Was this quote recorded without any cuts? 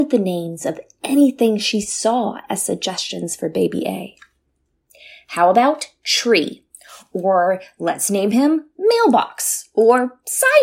yes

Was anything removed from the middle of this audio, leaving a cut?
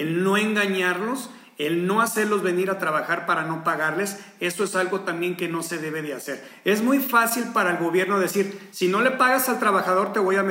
no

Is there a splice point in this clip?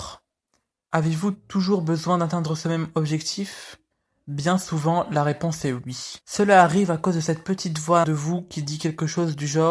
yes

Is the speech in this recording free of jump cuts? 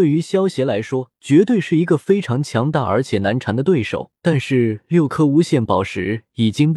no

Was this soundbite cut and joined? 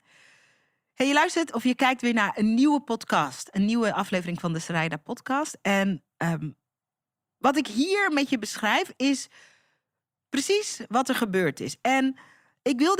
no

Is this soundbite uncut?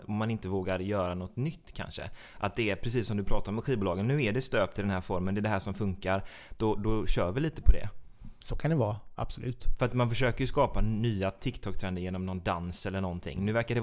yes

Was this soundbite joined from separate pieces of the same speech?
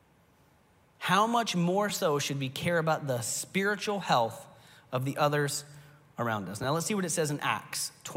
no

